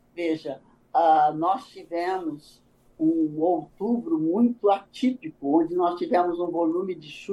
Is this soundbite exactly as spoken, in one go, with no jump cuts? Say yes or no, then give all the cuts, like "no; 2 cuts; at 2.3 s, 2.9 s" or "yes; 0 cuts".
yes; 0 cuts